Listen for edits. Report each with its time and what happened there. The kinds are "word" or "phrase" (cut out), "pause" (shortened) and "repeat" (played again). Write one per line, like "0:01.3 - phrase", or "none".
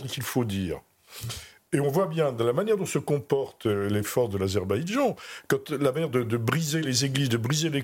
none

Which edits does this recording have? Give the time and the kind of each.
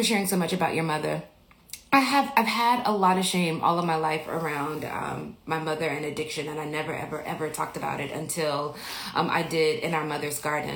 none

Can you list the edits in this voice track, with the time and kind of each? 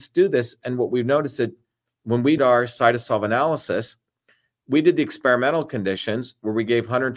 0:02.4 - word

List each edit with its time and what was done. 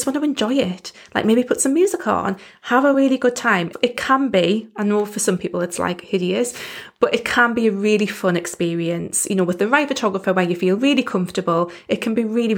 none

